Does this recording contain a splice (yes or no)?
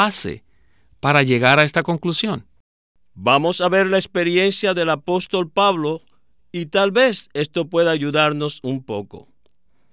no